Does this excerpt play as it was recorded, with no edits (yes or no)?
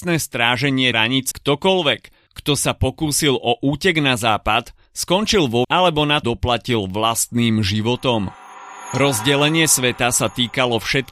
no